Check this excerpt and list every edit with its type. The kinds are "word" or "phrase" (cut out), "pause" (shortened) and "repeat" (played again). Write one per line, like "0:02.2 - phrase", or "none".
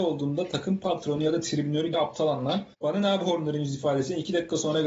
0:01.9 - word
0:02.7 - pause